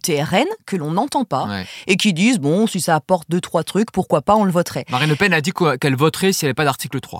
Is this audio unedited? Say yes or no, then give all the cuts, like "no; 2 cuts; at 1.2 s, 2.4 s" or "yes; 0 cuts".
yes; 0 cuts